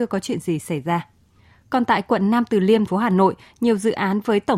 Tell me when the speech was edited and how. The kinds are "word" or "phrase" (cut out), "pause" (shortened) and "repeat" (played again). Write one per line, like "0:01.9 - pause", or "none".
0:02.9 - word